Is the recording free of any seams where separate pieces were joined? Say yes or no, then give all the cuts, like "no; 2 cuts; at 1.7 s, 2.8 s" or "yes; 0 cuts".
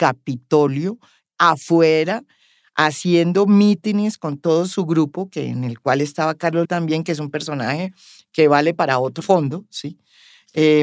no; 2 cuts; at 6.6 s, 9.2 s